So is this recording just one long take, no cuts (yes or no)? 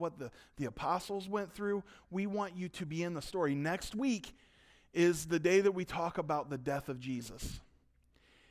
yes